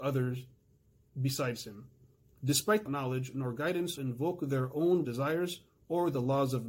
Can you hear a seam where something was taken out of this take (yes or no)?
yes